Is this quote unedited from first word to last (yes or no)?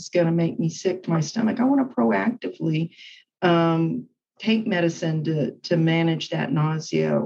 yes